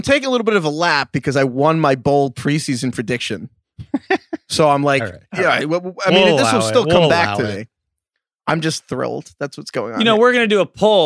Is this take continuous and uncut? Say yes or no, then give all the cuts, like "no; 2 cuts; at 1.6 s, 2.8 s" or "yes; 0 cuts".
yes; 0 cuts